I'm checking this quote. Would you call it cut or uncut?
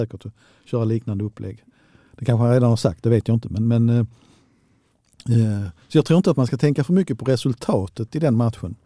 uncut